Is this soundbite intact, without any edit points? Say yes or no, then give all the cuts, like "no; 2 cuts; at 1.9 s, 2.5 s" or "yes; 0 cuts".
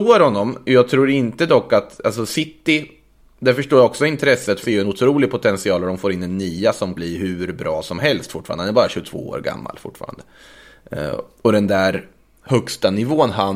no; 2 cuts; at 4.6 s, 7.0 s